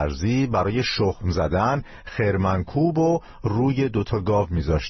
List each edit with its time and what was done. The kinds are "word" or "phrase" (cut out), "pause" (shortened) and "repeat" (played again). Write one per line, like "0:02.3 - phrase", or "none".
none